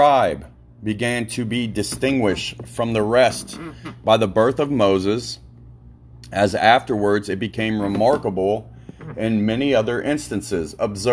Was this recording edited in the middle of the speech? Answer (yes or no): no